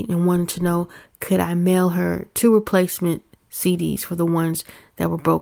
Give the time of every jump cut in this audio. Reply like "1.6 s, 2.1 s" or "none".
none